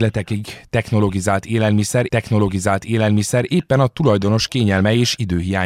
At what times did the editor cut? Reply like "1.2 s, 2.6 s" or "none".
2.1 s